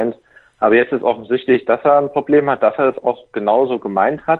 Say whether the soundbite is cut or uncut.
uncut